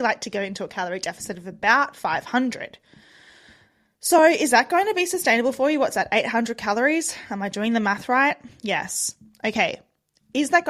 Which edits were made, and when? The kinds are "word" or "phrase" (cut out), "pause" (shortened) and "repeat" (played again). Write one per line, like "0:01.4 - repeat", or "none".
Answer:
none